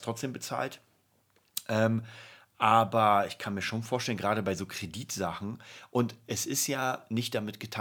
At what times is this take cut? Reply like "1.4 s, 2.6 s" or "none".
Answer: none